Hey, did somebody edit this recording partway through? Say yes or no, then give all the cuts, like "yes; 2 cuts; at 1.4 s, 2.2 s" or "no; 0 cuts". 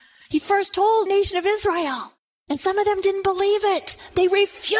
yes; 1 cut; at 1.1 s